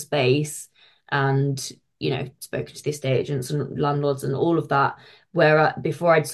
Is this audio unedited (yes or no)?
yes